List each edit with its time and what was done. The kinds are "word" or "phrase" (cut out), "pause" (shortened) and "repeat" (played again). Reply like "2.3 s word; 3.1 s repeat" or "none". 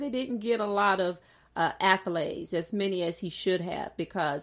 none